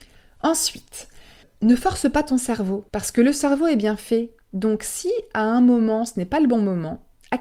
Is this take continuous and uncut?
no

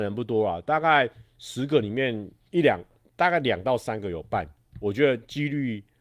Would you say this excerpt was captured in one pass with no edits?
yes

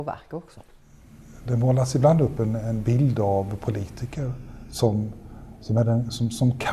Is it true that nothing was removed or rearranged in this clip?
yes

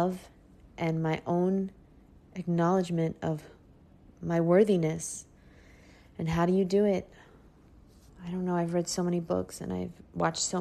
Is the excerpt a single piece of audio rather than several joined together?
yes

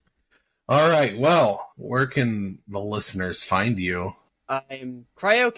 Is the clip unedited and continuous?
no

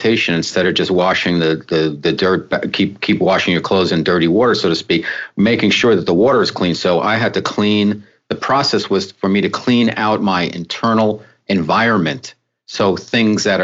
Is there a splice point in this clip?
no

